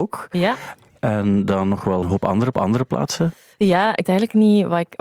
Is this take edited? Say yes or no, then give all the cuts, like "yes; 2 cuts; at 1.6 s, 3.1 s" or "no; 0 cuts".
yes; 3 cuts; at 2.0 s, 2.5 s, 4.0 s